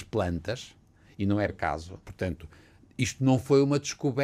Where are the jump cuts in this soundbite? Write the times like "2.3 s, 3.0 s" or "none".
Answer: 1.5 s, 2.0 s